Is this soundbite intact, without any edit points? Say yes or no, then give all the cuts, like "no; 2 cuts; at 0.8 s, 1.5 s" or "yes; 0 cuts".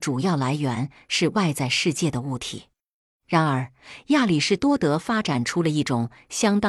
yes; 0 cuts